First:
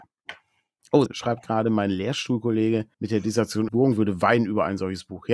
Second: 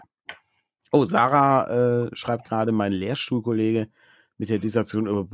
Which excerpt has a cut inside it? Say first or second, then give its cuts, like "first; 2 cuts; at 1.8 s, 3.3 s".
first; 3 cuts; at 1.1 s, 2.9 s, 3.7 s